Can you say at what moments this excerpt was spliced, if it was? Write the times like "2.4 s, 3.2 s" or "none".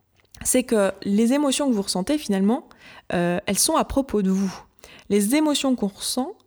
none